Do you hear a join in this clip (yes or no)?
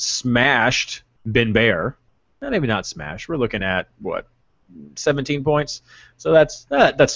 no